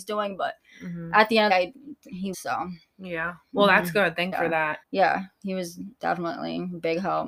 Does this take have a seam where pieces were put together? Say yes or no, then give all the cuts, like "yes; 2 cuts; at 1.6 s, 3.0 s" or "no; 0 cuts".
yes; 5 cuts; at 1.5 s, 2.3 s, 4.3 s, 4.8 s, 5.9 s